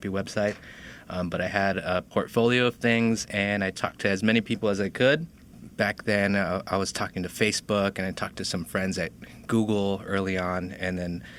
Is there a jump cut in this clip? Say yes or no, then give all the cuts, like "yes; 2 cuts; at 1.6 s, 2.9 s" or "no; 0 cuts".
no; 0 cuts